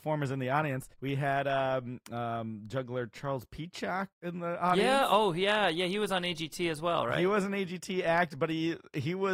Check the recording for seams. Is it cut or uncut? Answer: cut